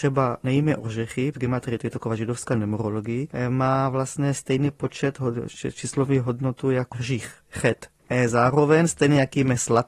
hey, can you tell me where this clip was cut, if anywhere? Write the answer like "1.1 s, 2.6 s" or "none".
1.3 s, 6.9 s

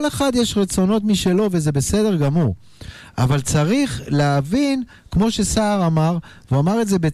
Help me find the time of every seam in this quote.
none

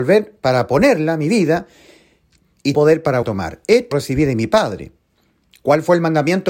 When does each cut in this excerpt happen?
2.7 s, 3.2 s, 3.9 s

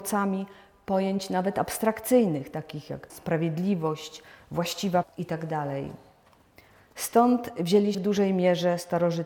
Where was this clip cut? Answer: 3.1 s, 5.0 s, 7.9 s

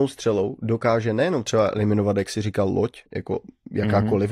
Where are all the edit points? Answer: 3.1 s

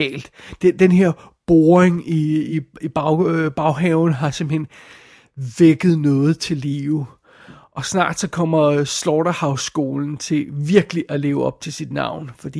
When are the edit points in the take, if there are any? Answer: none

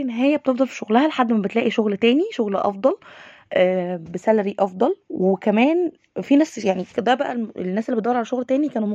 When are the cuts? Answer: none

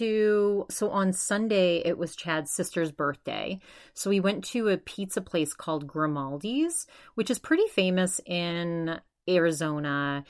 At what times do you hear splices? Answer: none

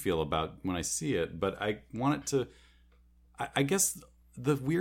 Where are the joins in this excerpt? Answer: none

